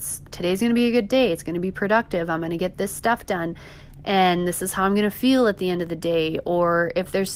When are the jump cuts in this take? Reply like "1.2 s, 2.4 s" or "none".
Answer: none